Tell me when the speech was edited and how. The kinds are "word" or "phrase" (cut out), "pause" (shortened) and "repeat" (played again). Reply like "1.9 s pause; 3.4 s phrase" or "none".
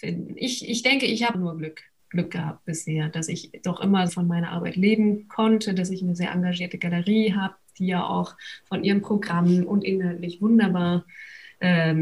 1.3 s word; 4.1 s word